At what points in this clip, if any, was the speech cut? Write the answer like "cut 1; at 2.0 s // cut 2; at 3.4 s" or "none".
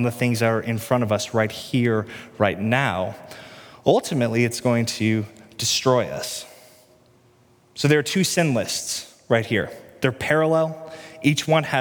none